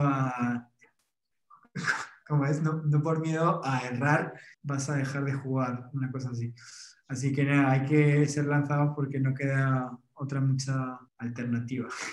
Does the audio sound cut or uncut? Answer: cut